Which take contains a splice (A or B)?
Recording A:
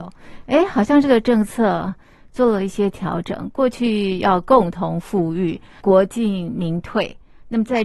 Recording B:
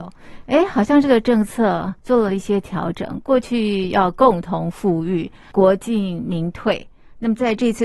B